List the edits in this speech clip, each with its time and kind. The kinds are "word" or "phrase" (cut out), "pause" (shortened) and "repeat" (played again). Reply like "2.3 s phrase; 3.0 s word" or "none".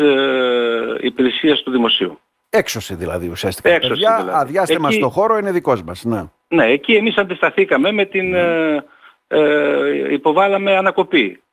none